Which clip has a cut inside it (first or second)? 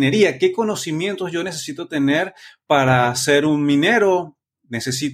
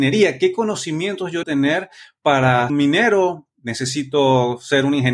second